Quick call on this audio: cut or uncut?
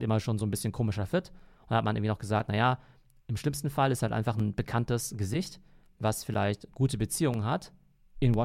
uncut